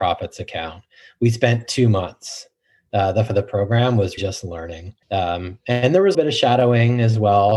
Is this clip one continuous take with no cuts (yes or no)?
no